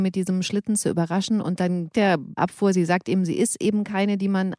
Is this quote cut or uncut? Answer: cut